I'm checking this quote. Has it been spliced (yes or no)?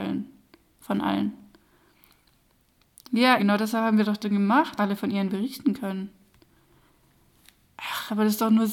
yes